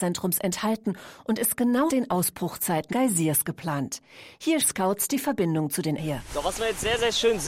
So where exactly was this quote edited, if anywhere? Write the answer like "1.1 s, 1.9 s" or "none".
1.9 s, 2.9 s, 4.6 s, 6.0 s